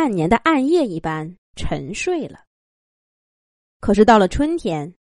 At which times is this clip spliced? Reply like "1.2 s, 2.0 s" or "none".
1.4 s